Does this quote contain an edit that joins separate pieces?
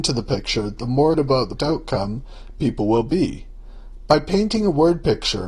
yes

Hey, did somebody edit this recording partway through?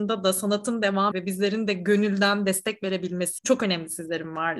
yes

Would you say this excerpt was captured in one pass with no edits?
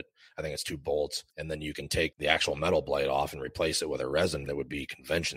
no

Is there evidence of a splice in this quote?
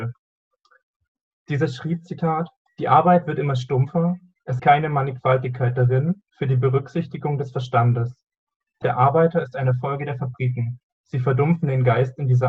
yes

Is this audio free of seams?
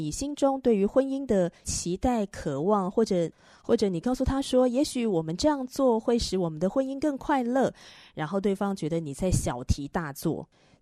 yes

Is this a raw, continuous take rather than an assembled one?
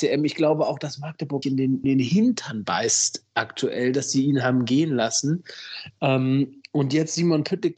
no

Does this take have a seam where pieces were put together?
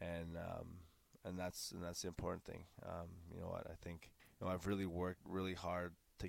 yes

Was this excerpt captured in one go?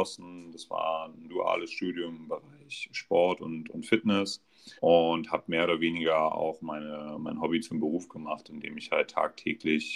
no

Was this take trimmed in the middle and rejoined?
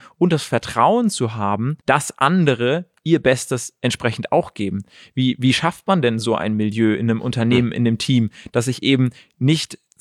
yes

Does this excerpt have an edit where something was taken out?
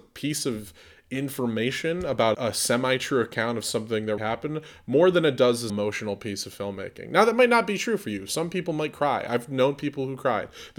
yes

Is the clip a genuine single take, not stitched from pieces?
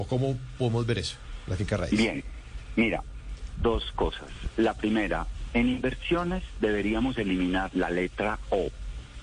no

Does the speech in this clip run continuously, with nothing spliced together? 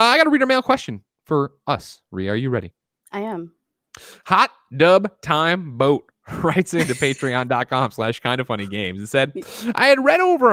yes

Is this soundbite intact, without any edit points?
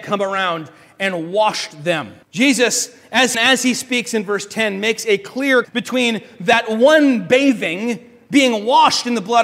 no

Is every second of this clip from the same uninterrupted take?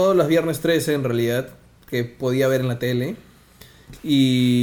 yes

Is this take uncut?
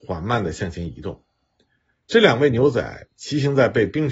yes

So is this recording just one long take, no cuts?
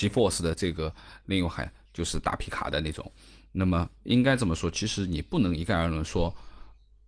yes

